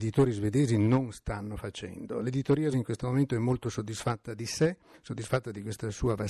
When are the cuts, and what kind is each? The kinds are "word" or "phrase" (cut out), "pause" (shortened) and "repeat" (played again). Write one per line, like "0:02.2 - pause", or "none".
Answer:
0:02.7 - word